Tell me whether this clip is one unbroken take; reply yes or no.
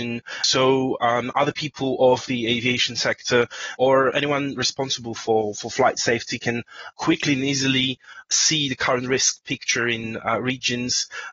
yes